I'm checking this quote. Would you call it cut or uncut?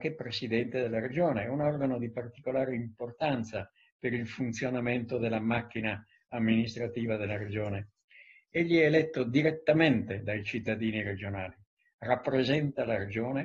uncut